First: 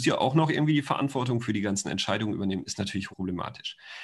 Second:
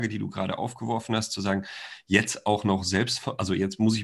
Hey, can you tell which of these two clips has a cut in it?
first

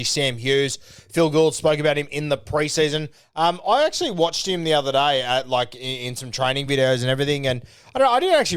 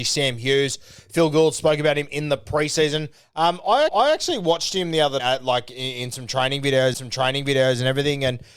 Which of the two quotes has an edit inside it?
second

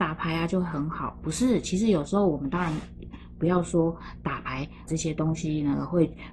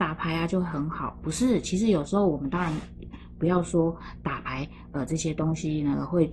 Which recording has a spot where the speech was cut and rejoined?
first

